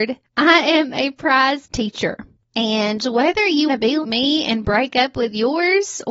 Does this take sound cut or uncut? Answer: cut